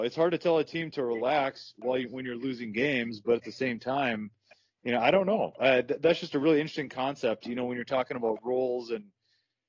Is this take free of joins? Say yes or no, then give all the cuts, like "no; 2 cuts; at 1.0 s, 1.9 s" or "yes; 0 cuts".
yes; 0 cuts